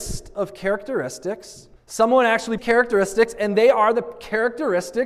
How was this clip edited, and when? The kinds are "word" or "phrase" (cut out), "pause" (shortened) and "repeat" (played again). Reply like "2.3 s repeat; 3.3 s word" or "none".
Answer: 1.8 s pause; 2.6 s phrase